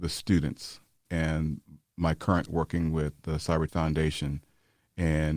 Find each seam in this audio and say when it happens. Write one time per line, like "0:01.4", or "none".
0:01.1
0:02.5
0:03.7